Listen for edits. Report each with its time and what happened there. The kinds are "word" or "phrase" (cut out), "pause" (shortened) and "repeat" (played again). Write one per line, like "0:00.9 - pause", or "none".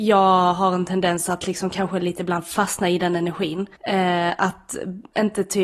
0:03.7 - pause